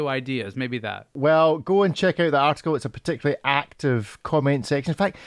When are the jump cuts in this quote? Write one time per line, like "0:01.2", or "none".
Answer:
none